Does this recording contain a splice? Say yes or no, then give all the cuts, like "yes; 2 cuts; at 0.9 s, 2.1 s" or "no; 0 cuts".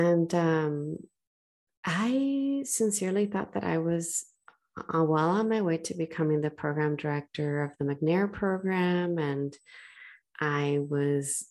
no; 0 cuts